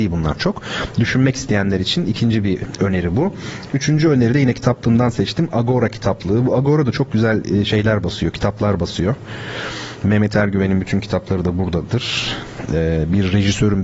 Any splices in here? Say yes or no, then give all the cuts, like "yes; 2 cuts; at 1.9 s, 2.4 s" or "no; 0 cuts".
no; 0 cuts